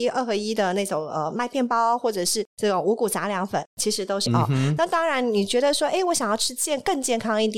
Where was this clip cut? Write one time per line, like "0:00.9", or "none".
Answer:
0:04.3